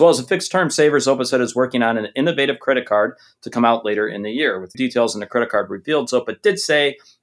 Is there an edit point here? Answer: yes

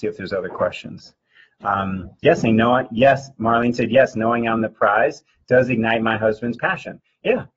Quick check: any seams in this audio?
no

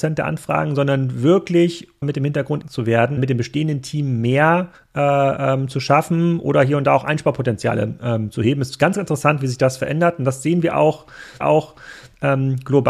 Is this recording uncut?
no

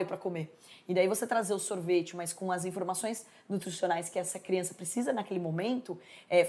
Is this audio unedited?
yes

